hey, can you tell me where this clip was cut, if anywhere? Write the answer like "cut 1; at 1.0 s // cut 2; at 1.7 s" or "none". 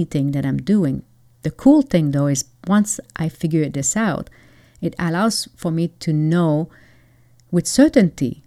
none